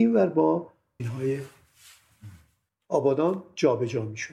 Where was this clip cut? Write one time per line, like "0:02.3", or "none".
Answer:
0:01.0